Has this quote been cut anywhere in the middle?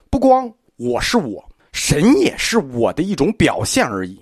yes; 1 cut; at 1.6 s

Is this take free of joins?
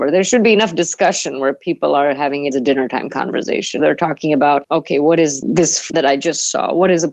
no; 3 cuts; at 2.5 s, 3.8 s, 5.9 s

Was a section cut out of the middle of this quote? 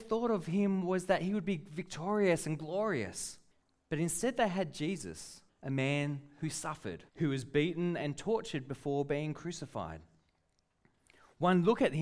yes; 3 cuts; at 3.5 s, 5.5 s, 7.1 s

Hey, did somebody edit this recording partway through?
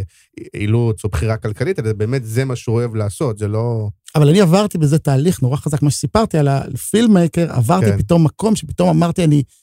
no; 0 cuts

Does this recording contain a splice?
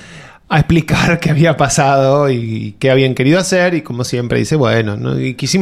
no; 0 cuts

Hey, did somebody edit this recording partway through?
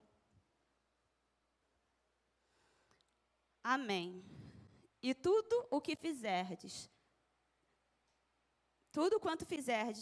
no; 0 cuts

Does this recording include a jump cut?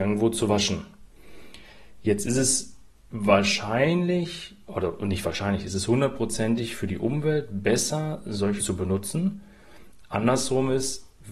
yes; 1 cut; at 8.6 s

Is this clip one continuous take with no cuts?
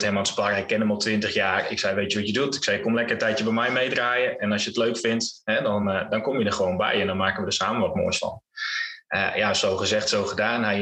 yes; 0 cuts

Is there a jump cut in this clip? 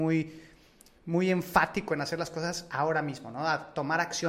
no; 0 cuts

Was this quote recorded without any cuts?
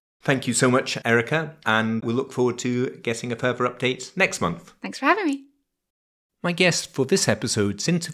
yes; 0 cuts

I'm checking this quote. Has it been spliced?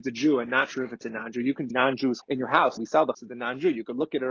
yes; 4 cuts; at 1.7 s, 2.2 s, 2.8 s, 3.1 s

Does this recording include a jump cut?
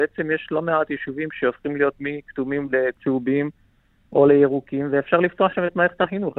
no; 0 cuts

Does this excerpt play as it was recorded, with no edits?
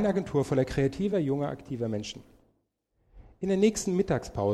yes; 0 cuts

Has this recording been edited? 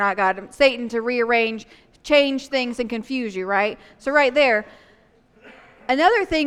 no; 0 cuts

